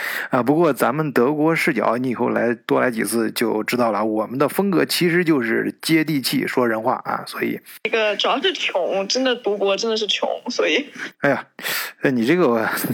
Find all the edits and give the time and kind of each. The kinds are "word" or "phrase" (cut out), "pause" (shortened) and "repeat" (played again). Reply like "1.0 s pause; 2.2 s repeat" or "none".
11.1 s pause